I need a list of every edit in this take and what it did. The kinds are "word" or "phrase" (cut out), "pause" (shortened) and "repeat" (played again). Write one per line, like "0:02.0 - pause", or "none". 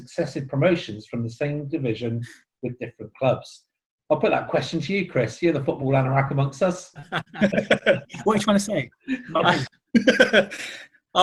none

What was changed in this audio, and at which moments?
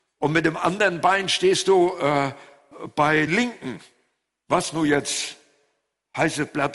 0:03.3 - word

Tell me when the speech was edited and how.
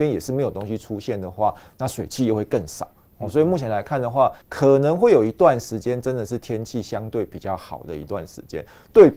0:04.4 - pause

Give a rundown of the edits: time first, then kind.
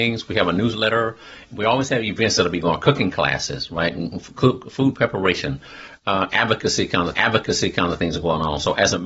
0:07.1 - repeat

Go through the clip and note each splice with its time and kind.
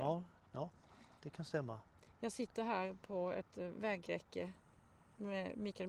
none

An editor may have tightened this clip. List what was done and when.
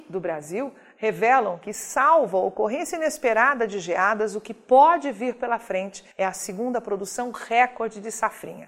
0:06.1 - pause

